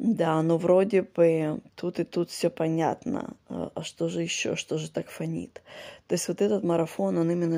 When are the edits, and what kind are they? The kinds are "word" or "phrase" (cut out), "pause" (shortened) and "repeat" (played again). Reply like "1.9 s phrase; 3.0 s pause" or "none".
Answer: none